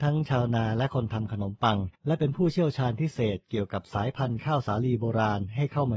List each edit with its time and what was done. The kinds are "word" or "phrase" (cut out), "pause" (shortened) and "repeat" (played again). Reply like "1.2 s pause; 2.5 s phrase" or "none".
1.9 s pause